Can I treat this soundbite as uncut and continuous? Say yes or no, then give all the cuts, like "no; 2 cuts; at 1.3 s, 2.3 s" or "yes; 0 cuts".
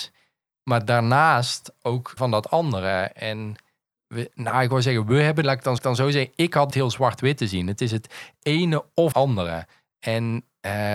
no; 6 cuts; at 2.2 s, 4.3 s, 5.4 s, 5.8 s, 6.7 s, 9.1 s